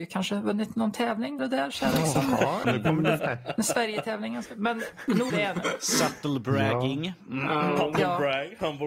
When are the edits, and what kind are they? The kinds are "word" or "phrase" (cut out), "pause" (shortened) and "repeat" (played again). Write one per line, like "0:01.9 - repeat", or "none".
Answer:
0:01.4 - word
0:02.6 - word
0:03.2 - word
0:05.3 - word